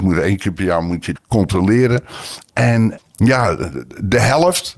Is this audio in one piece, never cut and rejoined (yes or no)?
no